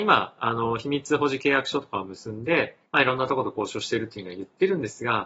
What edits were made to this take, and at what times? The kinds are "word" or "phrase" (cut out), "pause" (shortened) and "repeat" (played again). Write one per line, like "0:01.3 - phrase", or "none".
0:02.9 - pause